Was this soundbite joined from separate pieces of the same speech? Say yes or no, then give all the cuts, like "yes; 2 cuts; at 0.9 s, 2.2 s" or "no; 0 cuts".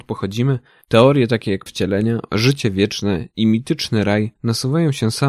yes; 2 cuts; at 1.7 s, 4.4 s